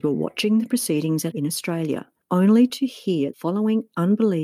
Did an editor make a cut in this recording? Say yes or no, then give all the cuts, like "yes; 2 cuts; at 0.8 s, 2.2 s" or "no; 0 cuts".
yes; 2 cuts; at 1.3 s, 3.3 s